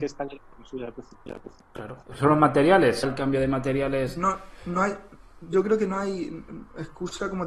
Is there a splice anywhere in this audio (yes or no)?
yes